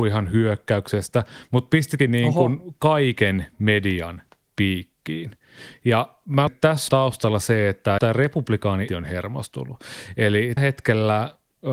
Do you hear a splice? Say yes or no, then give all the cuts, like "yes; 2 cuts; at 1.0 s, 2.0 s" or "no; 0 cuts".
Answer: yes; 6 cuts; at 2.0 s, 6.5 s, 6.9 s, 8.0 s, 8.9 s, 10.6 s